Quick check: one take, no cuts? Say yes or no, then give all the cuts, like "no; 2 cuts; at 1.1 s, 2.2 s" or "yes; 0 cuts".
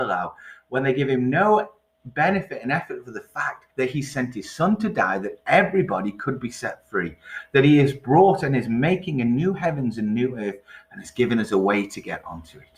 no; 1 cut; at 3.7 s